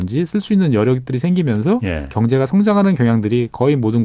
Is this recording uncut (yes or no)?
yes